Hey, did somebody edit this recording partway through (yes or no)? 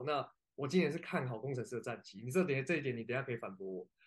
no